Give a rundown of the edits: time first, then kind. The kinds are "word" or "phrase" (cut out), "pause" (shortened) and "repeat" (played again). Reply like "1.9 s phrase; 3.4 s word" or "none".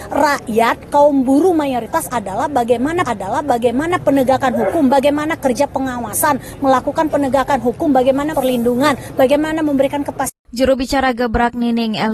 3.0 s repeat; 8.3 s word

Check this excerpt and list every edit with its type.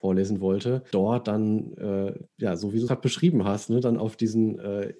0.9 s word; 2.3 s pause; 2.9 s word

